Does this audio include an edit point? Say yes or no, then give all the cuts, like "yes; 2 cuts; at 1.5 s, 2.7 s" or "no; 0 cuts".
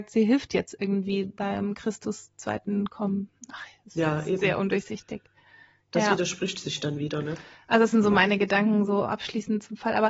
no; 0 cuts